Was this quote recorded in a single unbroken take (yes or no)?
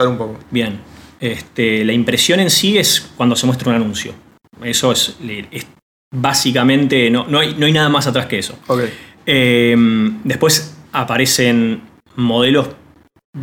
yes